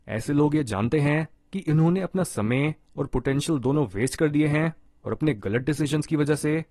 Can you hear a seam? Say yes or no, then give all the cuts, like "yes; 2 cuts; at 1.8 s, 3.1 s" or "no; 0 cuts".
no; 0 cuts